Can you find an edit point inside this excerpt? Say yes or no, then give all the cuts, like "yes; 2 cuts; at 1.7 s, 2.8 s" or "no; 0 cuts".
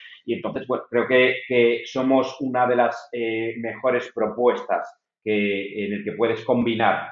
no; 0 cuts